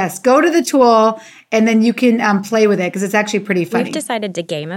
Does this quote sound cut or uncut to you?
uncut